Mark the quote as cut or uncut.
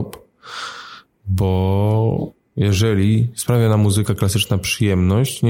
uncut